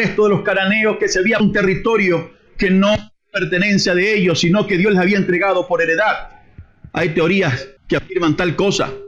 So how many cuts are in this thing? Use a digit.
3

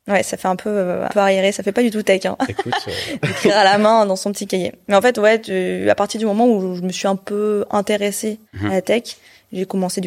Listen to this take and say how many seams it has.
2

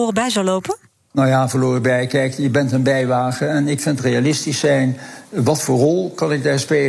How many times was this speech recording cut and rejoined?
1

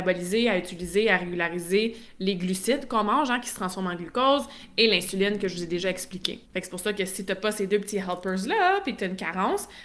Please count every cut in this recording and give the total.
1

